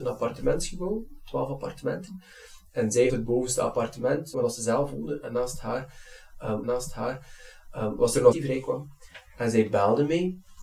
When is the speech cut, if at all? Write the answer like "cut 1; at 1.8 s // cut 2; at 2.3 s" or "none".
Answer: cut 1; at 3.1 s // cut 2; at 4.3 s // cut 3; at 6.6 s // cut 4; at 8.3 s